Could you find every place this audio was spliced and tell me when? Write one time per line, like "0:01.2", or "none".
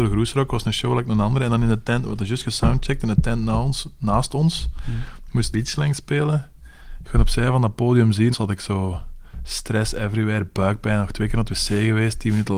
0:05.5
0:08.3